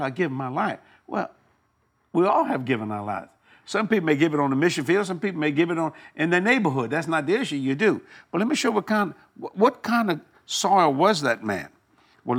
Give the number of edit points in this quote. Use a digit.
0